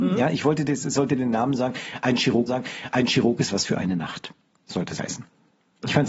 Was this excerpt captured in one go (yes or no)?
no